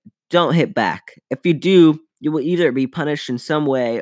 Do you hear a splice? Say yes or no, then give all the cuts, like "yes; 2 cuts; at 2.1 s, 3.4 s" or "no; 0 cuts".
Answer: no; 0 cuts